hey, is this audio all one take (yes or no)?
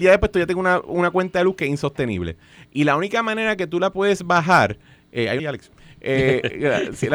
no